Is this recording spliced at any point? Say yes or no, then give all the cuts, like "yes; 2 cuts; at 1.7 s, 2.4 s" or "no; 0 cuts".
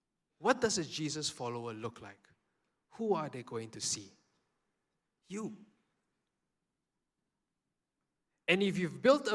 no; 0 cuts